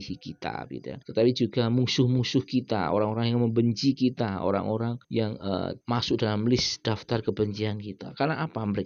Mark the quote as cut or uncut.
cut